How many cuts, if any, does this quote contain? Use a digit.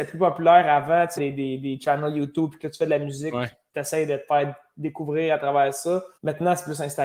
2